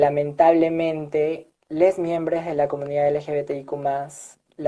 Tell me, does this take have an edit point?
yes; 1 cut; at 1.6 s

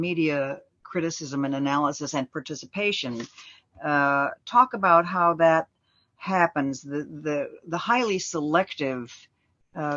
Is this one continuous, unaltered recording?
yes; 0 cuts

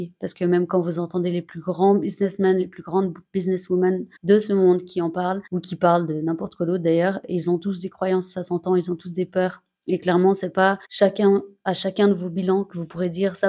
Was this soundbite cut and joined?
yes; 3 cuts; at 4.2 s, 5.5 s, 10.8 s

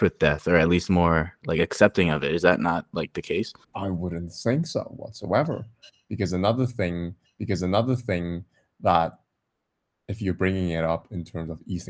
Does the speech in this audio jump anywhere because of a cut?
yes; 2 cuts; at 3.6 s, 7.3 s

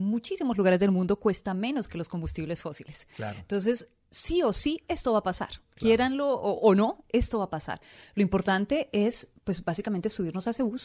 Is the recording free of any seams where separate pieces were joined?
yes; 0 cuts

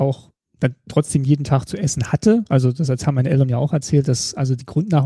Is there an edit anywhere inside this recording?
no; 0 cuts

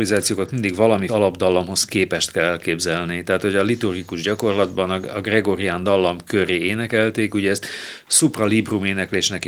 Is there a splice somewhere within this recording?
yes; 1 cut; at 1.1 s

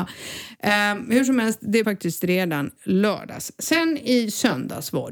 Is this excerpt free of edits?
no; 2 cuts; at 1.8 s, 2.8 s

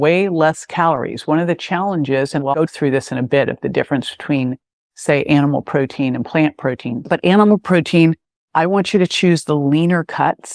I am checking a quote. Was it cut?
yes; 1 cut; at 2.5 s

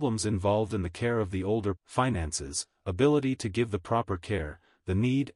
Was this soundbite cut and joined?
yes; 1 cut; at 1.8 s

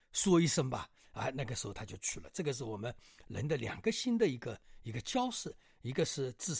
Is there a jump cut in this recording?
no; 0 cuts

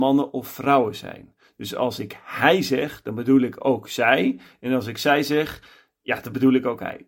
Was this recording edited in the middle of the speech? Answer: no; 0 cuts

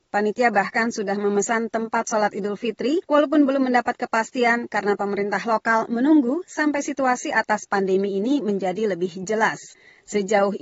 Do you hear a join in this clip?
yes; 1 cut; at 3.0 s

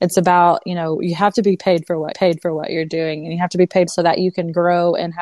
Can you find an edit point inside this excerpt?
yes; 2 cuts; at 2.1 s, 3.9 s

